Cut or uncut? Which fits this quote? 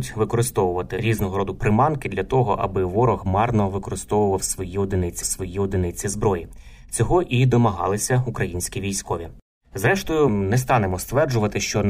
cut